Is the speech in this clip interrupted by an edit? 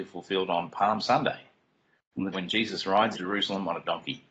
yes; 2 cuts; at 2.3 s, 3.1 s

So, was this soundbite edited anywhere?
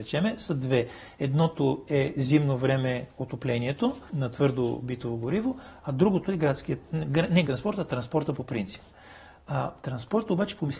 yes; 2 cuts; at 4.1 s, 7.5 s

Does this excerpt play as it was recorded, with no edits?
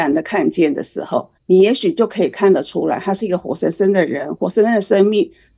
no; 1 cut; at 1.4 s

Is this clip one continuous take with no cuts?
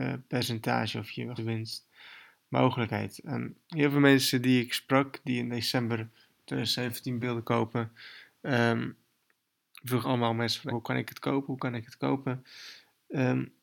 no; 5 cuts; at 1.4 s, 3.6 s, 7.2 s, 10.0 s, 10.7 s

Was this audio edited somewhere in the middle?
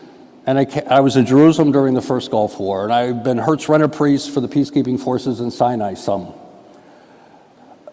no; 0 cuts

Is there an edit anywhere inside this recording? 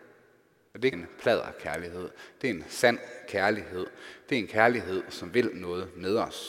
yes; 1 cut; at 0.9 s

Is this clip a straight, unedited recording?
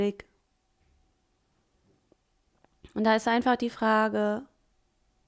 yes; 0 cuts

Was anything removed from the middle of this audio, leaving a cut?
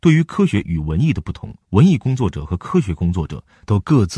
yes; 1 cut; at 1.6 s

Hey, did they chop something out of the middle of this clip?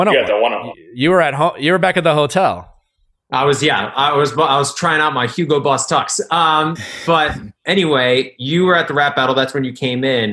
no; 0 cuts

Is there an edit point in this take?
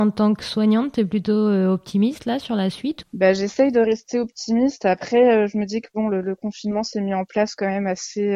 no; 0 cuts

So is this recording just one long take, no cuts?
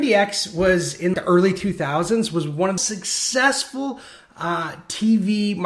no; 2 cuts; at 1.1 s, 2.8 s

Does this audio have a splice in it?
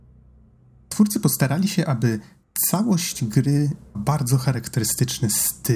yes; 1 cut; at 3.9 s

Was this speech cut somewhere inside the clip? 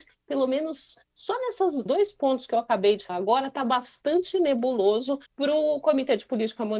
yes; 3 cuts; at 1.9 s, 3.1 s, 5.3 s

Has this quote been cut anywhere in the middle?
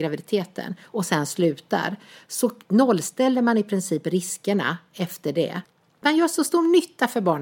no; 0 cuts

